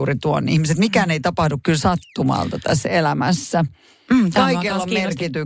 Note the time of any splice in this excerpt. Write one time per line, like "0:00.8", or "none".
none